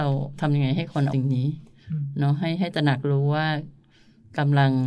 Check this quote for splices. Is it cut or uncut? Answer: cut